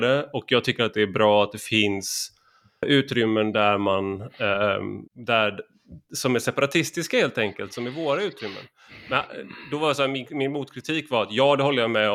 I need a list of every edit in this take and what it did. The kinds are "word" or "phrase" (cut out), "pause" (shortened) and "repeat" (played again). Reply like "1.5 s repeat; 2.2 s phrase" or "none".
2.8 s word; 5.1 s pause